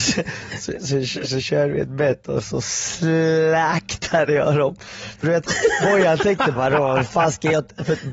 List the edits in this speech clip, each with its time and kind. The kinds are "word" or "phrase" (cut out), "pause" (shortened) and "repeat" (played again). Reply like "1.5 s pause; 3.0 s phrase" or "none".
6.5 s word